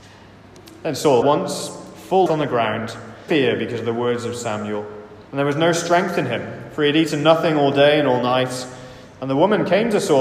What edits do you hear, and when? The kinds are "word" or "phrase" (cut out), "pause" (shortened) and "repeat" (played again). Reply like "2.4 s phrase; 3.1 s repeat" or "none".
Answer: 1.2 s phrase; 2.3 s word; 3.3 s phrase; 5.3 s pause